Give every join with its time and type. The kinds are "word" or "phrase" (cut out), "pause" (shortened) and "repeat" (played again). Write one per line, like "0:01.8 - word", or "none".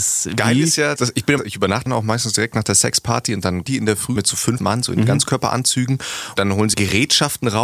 0:01.0 - word
0:01.4 - word
0:01.9 - word
0:03.7 - word
0:04.2 - word
0:04.6 - word
0:06.4 - word
0:06.7 - word